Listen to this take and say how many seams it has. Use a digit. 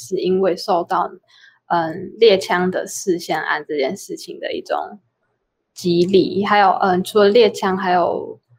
0